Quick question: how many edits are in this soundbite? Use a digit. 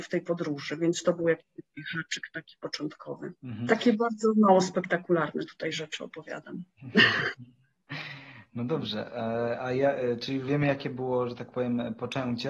1